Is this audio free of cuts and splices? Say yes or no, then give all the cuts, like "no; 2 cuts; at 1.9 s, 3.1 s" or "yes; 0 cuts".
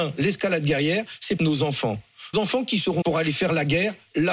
no; 3 cuts; at 1.4 s, 2.3 s, 3.0 s